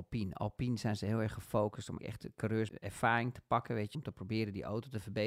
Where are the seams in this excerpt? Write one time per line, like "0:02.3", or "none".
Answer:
0:02.0
0:02.7
0:03.9